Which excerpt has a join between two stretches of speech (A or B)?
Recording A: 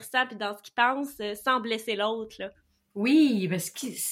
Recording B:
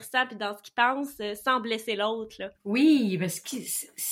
B